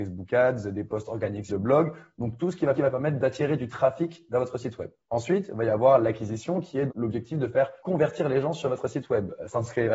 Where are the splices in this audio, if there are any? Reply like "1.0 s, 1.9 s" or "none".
1.5 s, 2.7 s, 5.0 s, 6.9 s, 7.8 s